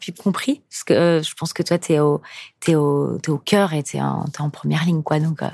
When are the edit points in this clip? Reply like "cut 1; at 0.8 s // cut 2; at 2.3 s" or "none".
none